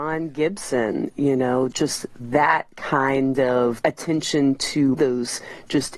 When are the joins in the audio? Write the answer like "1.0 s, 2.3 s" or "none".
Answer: 4.9 s